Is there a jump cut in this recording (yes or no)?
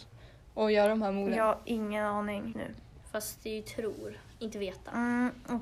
yes